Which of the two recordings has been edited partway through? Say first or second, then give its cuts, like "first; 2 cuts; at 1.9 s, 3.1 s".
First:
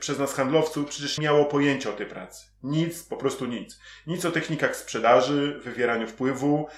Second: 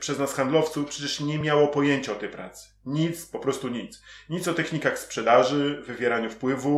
first; 1 cut; at 1.2 s